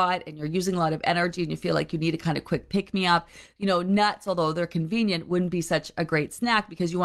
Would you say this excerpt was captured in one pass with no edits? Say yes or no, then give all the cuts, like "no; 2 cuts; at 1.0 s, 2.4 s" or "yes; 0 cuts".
yes; 0 cuts